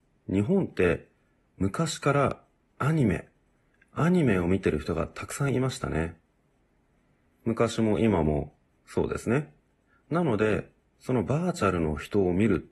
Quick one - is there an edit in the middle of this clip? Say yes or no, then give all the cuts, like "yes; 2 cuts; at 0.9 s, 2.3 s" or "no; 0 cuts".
no; 0 cuts